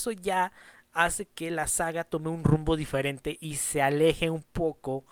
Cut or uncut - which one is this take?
uncut